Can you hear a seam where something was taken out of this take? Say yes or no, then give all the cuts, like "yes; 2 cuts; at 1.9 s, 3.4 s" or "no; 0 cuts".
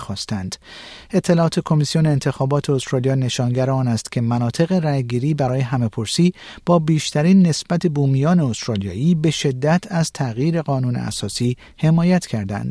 no; 0 cuts